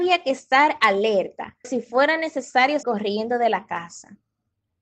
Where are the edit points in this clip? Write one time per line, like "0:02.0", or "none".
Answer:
0:01.6
0:02.8